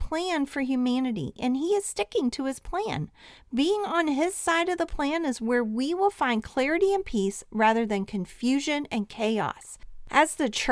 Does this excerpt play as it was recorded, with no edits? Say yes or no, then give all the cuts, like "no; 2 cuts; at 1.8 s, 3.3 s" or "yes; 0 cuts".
yes; 0 cuts